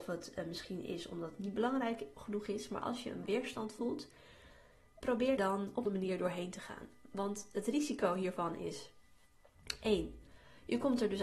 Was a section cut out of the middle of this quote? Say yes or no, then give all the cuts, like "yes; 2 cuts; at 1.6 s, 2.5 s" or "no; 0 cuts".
yes; 5 cuts; at 2.1 s, 3.2 s, 5.0 s, 5.4 s, 5.8 s